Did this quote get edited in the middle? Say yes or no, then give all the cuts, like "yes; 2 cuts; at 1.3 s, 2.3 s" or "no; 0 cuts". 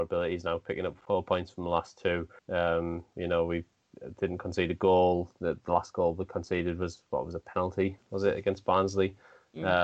yes; 1 cut; at 2.4 s